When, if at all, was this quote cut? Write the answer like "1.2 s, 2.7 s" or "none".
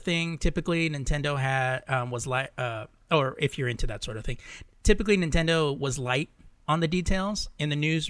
none